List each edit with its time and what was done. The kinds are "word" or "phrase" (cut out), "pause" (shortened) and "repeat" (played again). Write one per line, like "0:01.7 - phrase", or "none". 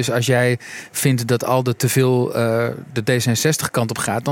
none